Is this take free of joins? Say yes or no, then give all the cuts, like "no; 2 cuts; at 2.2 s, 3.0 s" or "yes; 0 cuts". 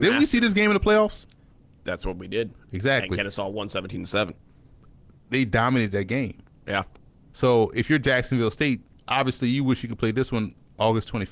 yes; 0 cuts